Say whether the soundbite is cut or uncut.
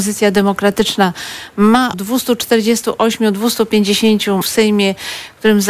cut